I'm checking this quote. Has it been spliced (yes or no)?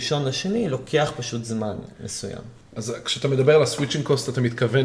no